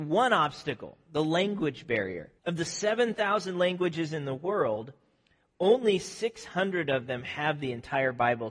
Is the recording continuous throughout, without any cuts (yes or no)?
no